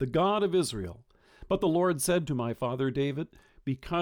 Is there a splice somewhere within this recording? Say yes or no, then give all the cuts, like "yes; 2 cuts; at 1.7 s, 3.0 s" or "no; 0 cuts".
no; 0 cuts